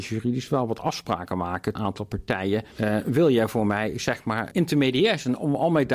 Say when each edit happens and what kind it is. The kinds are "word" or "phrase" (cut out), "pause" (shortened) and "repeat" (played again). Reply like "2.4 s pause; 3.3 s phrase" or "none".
1.7 s phrase; 2.7 s pause; 4.5 s word